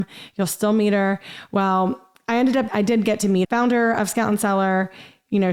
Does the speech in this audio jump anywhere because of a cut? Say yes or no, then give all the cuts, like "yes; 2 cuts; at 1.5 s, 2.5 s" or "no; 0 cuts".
yes; 2 cuts; at 2.7 s, 3.4 s